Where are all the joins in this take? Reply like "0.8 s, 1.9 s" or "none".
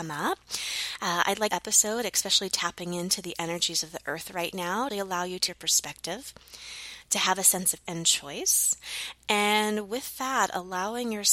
1.5 s, 4.9 s, 5.5 s, 7.9 s